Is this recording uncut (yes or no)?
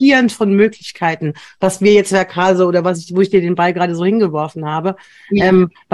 yes